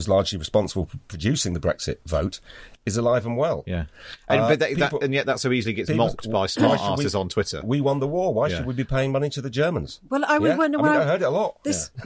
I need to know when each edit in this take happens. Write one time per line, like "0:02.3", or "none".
none